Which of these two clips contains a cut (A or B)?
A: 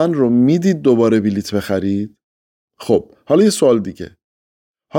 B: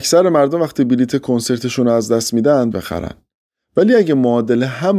B